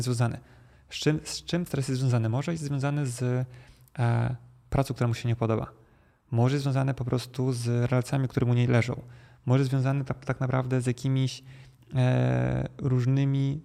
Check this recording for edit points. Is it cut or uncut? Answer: cut